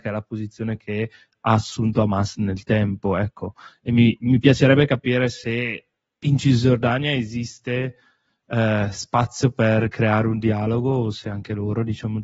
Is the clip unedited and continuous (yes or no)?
yes